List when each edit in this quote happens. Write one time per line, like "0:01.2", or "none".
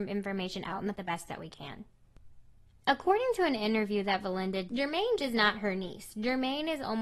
0:00.9
0:04.7
0:05.2